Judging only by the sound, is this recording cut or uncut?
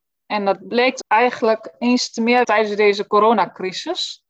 cut